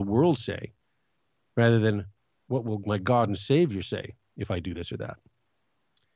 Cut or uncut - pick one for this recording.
uncut